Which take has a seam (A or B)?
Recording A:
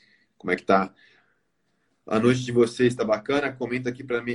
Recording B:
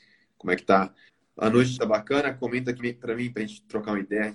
B